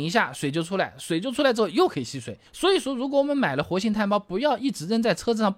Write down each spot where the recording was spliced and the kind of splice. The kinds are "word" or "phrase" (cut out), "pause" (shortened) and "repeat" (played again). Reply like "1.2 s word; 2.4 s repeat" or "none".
2.5 s pause